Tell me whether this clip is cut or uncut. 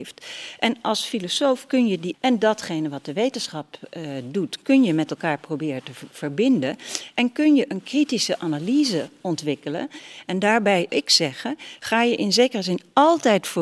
cut